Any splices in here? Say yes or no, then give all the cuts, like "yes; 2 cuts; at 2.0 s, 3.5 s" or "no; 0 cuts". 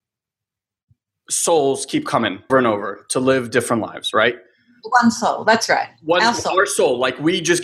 yes; 1 cut; at 2.5 s